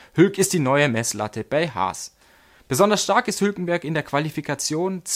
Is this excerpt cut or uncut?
uncut